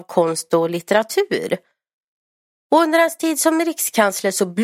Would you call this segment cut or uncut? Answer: uncut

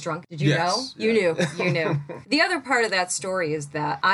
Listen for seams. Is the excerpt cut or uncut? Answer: uncut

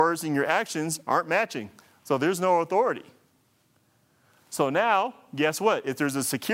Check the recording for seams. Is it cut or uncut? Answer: uncut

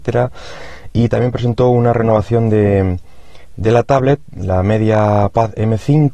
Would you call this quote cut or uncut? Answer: uncut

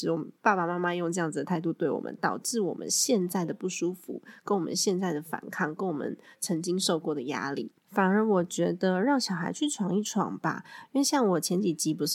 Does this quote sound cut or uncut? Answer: cut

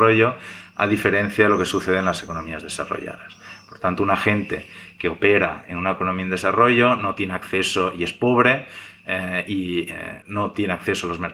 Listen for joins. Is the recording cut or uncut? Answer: cut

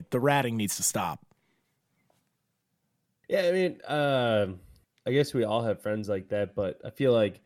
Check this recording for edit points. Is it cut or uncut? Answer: uncut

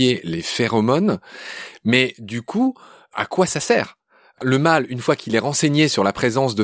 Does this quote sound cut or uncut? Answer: uncut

